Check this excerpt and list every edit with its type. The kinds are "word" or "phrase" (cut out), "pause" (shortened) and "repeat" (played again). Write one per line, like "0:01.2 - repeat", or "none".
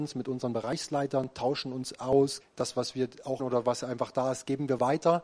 0:02.4 - word
0:03.4 - word